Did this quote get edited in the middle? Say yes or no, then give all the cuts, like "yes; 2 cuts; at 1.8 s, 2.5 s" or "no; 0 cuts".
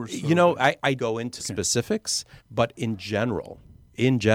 yes; 3 cuts; at 1.0 s, 1.4 s, 2.4 s